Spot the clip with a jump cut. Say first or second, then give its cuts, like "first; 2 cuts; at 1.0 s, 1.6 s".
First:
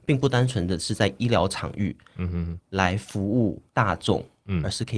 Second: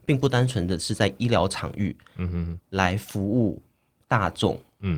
first; 1 cut; at 3.7 s